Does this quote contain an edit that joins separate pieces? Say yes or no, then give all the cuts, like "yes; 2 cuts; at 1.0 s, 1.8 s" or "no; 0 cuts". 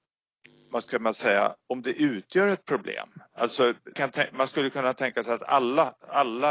yes; 2 cuts; at 1.5 s, 3.9 s